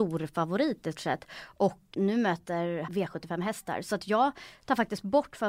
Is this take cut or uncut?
cut